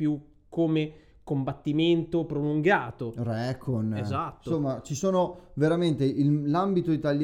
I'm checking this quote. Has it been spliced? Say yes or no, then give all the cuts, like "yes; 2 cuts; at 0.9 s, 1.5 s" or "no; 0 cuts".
no; 0 cuts